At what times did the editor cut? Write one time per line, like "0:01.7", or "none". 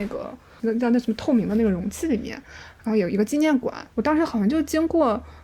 0:03.9

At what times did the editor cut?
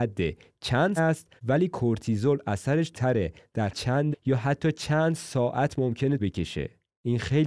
0:01.0
0:01.4
0:02.9
0:03.7
0:04.1
0:06.2

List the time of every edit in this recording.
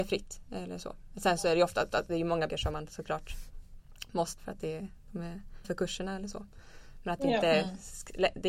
0:01.9
0:02.5
0:04.4
0:05.6

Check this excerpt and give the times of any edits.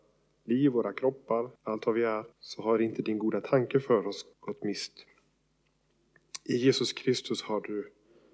0:01.6
0:02.3
0:04.3

